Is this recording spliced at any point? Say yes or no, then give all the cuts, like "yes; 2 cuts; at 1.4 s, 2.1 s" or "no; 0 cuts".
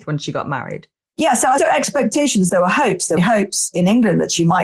yes; 3 cuts; at 1.6 s, 2.5 s, 3.2 s